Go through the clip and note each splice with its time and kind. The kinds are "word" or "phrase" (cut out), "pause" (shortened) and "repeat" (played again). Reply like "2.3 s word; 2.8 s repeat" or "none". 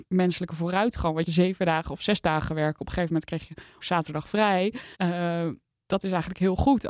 1.3 s phrase; 3.8 s word; 4.9 s pause